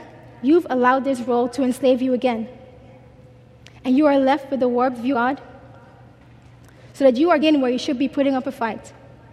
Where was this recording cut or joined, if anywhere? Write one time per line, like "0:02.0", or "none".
0:05.1
0:07.4